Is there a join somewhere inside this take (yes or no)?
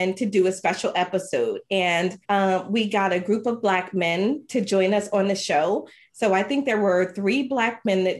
yes